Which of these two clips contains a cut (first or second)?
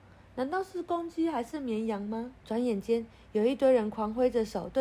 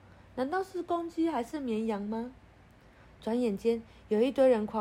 first